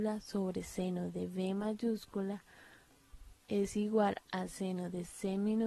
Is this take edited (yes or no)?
no